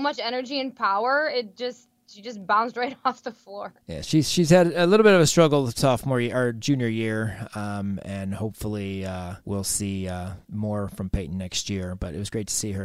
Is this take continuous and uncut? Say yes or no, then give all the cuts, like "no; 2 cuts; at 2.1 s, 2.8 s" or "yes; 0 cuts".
no; 2 cuts; at 3.8 s, 9.4 s